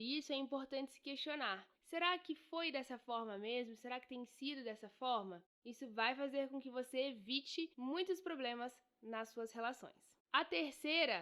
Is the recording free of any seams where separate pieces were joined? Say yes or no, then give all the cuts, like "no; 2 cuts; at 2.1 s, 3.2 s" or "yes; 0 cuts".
no; 3 cuts; at 1.7 s, 7.7 s, 10.2 s